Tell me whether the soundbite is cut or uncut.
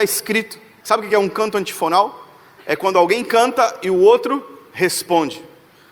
uncut